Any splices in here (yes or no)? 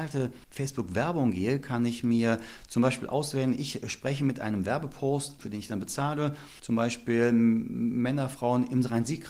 yes